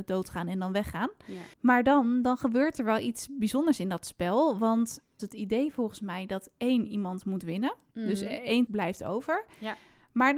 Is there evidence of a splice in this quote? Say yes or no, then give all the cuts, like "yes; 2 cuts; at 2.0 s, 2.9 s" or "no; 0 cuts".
yes; 3 cuts; at 1.5 s, 5.2 s, 8.7 s